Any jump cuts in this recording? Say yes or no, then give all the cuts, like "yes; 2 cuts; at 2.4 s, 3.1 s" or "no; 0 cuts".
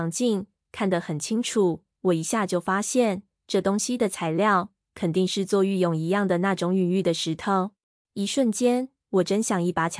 yes; 1 cut; at 8.0 s